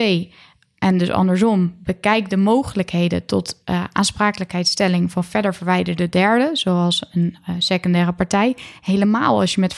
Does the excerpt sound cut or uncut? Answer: uncut